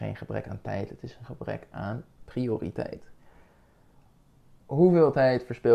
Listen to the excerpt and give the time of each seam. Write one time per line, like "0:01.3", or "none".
none